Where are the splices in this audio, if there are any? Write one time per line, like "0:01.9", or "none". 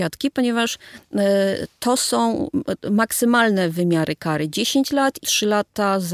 0:05.2